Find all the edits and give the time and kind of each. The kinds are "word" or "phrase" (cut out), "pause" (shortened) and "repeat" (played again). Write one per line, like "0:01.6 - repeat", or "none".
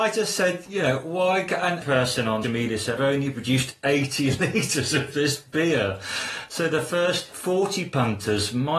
0:01.8 - phrase
0:02.4 - word
0:03.0 - phrase